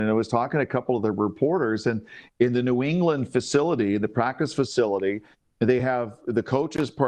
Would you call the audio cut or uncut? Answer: uncut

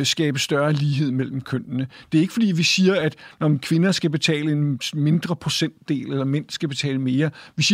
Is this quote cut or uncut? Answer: uncut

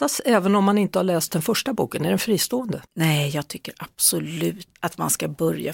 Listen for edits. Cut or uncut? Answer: cut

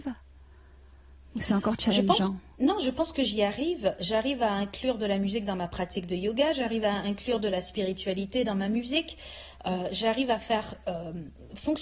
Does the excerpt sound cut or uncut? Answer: cut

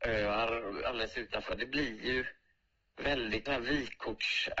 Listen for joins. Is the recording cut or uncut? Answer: cut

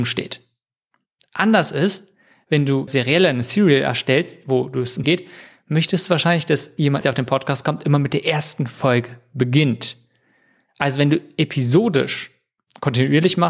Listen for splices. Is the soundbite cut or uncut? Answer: cut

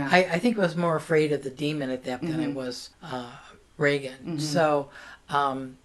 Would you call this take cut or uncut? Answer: cut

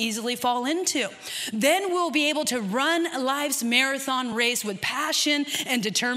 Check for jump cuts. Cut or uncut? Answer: uncut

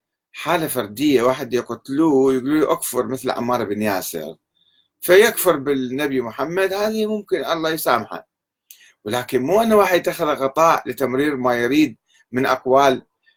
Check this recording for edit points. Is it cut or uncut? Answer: uncut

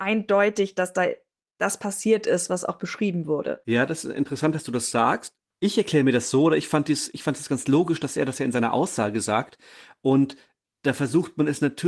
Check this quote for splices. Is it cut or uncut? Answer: uncut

